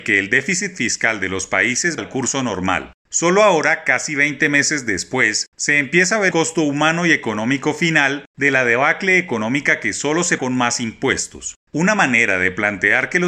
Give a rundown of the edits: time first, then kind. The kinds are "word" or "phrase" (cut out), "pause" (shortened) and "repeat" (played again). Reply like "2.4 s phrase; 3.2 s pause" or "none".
2.0 s word; 6.3 s word; 10.4 s word